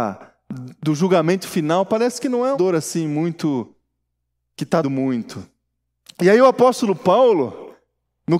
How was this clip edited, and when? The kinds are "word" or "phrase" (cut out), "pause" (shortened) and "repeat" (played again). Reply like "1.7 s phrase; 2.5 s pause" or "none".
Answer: 2.5 s word; 4.8 s word